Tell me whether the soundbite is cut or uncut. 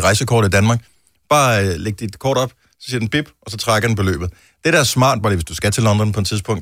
uncut